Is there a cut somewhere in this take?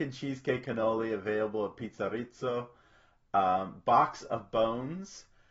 no; 0 cuts

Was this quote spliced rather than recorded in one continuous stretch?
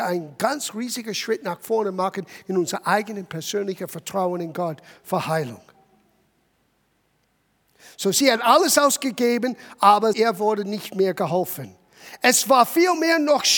no; 0 cuts

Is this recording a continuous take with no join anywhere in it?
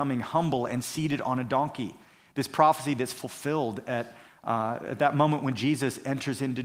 yes; 0 cuts

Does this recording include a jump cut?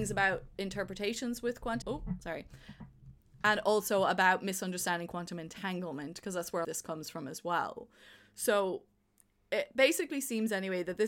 yes; 2 cuts; at 1.8 s, 6.6 s

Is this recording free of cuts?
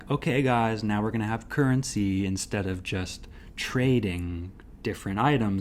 yes; 0 cuts

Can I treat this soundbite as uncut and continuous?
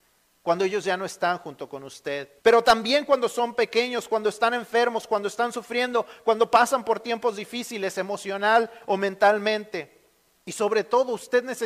no; 1 cut; at 2.4 s

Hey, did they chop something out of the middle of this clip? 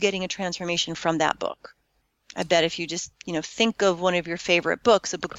no; 0 cuts

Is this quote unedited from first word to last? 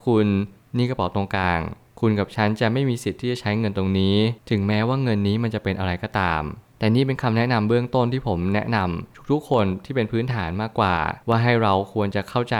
no; 2 cuts; at 4.4 s, 11.2 s

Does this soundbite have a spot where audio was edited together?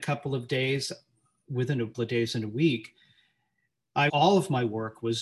yes; 2 cuts; at 1.9 s, 4.1 s

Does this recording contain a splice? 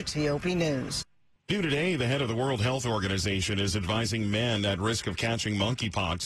no; 0 cuts

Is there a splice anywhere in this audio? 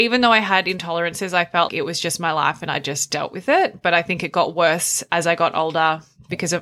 yes; 1 cut; at 1.7 s

